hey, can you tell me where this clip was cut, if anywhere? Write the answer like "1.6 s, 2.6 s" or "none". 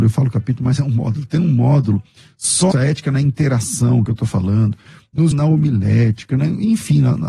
2.7 s, 4.1 s, 5.3 s